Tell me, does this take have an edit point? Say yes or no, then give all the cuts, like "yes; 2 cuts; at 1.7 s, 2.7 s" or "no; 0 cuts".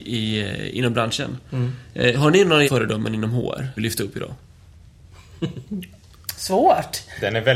yes; 2 cuts; at 2.6 s, 3.8 s